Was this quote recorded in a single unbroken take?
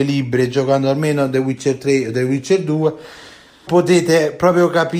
no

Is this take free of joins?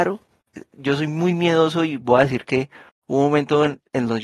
yes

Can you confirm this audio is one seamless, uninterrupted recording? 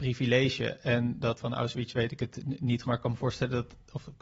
no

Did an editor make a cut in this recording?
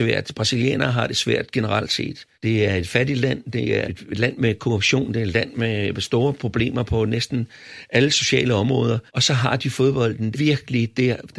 yes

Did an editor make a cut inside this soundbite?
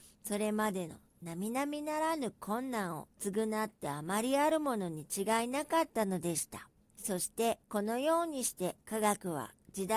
yes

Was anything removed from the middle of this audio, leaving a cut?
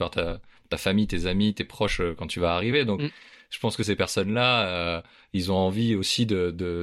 no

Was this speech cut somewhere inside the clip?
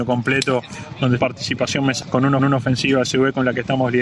yes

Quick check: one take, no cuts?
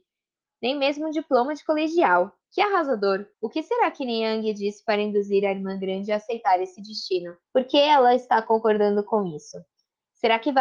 no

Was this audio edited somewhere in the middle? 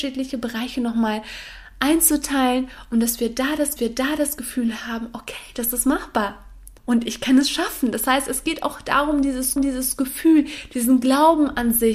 yes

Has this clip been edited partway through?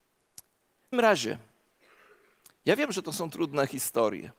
yes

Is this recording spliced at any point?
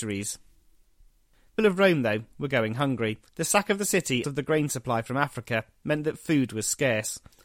yes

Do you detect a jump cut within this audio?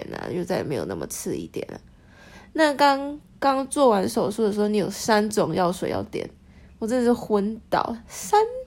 no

